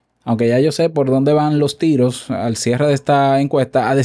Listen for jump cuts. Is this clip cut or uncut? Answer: uncut